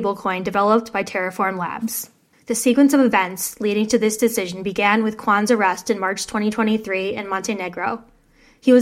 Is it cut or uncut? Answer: uncut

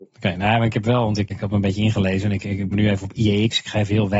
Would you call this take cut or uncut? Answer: cut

